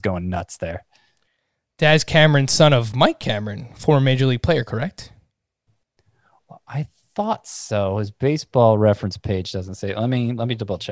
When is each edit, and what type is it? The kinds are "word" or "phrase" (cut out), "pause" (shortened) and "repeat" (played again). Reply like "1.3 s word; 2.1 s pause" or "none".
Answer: none